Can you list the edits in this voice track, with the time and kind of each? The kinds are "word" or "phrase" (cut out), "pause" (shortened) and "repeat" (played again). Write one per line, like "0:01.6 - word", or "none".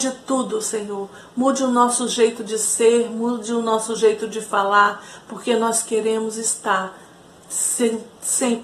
none